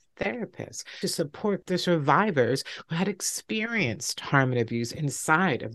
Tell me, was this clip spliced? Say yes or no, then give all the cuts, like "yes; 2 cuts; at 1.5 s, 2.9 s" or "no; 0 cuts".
yes; 1 cut; at 1.0 s